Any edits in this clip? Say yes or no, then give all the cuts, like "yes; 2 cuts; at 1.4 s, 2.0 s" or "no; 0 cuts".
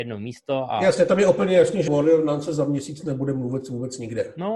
yes; 1 cut; at 1.9 s